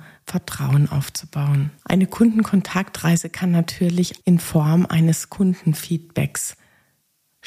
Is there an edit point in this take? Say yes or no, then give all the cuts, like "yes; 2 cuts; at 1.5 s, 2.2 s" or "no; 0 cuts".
yes; 2 cuts; at 1.8 s, 4.2 s